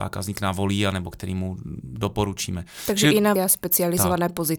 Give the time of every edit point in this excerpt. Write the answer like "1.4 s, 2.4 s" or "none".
3.4 s